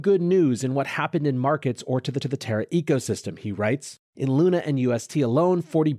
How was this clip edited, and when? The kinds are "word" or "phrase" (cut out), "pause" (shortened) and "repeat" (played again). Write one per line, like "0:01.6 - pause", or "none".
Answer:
0:02.2 - repeat
0:04.0 - pause